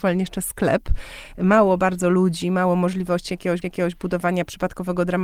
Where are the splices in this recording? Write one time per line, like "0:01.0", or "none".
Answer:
0:03.6